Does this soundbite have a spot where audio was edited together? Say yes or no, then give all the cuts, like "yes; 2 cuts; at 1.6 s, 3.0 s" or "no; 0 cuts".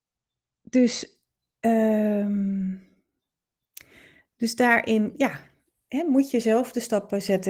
no; 0 cuts